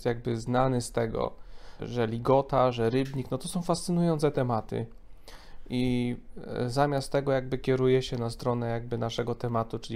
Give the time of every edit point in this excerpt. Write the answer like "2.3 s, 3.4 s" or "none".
1.8 s